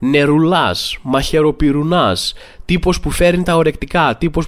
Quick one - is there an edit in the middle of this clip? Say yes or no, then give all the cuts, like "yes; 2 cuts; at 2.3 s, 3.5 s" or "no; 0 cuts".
no; 0 cuts